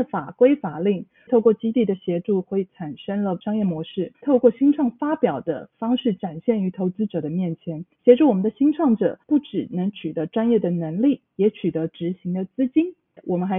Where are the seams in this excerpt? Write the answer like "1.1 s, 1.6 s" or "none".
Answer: 4.1 s, 7.9 s, 9.2 s